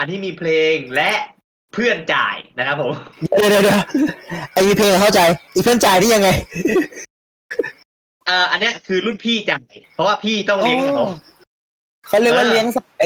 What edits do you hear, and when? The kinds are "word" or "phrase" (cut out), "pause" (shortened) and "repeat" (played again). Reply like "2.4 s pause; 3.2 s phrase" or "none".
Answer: 9.8 s pause